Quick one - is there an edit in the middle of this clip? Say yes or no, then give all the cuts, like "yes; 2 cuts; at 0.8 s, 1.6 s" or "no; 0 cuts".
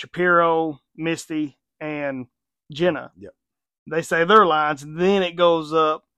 no; 0 cuts